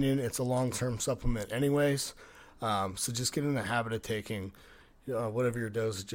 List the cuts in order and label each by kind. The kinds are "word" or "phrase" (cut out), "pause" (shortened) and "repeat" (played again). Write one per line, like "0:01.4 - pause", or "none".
none